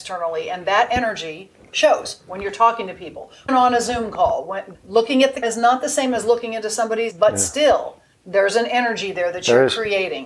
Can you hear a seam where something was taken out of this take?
yes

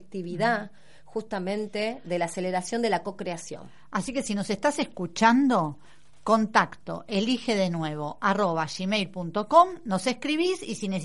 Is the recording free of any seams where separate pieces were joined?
yes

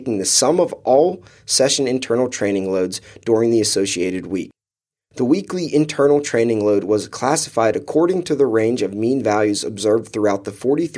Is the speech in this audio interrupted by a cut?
no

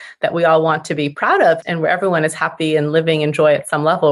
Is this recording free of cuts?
yes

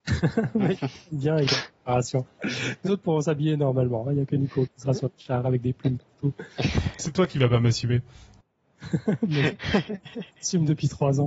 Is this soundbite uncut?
no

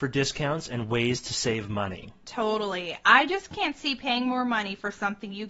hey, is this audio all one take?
yes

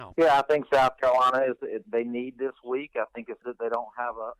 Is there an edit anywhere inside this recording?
yes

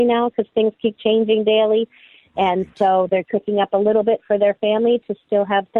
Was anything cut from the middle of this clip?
yes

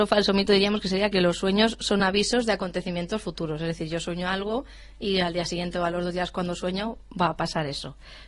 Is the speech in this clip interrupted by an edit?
no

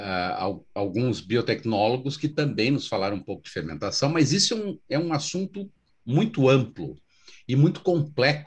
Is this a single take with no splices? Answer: yes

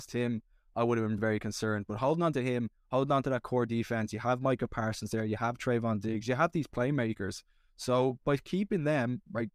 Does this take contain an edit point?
yes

